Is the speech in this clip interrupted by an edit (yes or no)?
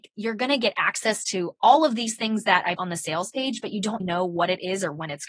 yes